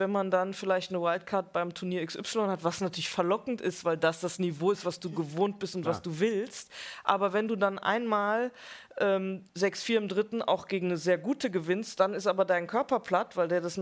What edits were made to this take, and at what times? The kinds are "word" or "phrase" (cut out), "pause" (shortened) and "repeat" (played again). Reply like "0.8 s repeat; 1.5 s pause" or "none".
9.5 s pause